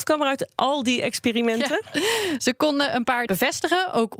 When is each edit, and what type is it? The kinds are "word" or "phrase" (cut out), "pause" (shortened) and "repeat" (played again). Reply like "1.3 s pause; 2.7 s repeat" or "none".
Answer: 3.3 s word

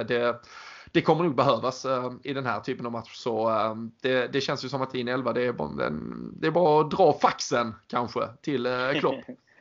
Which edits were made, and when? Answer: none

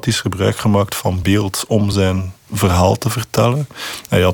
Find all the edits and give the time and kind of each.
none

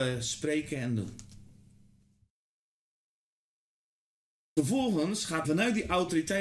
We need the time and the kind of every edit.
5.4 s word

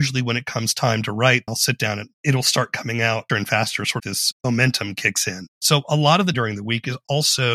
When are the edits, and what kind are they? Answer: 1.5 s word; 3.3 s word; 4.0 s phrase; 6.3 s phrase

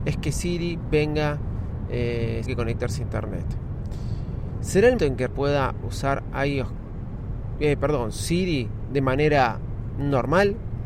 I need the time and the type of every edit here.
2.5 s phrase; 5.0 s word; 5.3 s word

